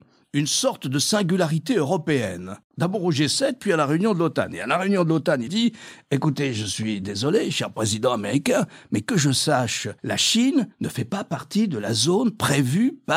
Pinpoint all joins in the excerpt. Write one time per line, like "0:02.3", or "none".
0:05.5
0:10.0
0:10.7